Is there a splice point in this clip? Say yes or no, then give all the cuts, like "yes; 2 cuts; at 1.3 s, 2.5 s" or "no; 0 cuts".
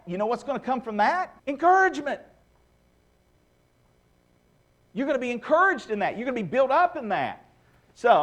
yes; 1 cut; at 1.4 s